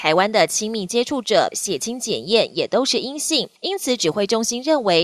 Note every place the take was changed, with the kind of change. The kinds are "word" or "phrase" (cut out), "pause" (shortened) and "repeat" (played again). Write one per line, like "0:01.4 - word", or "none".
0:01.5 - word
0:03.6 - pause